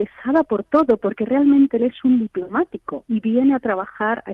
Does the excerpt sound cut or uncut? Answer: uncut